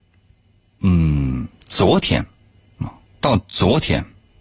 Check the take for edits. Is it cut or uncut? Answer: uncut